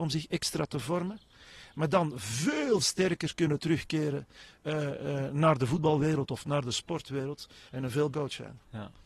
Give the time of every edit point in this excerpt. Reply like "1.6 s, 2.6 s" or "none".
2.8 s, 8.1 s